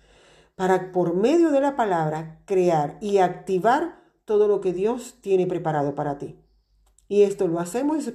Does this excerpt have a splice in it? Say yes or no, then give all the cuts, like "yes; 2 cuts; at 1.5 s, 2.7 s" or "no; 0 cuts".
no; 0 cuts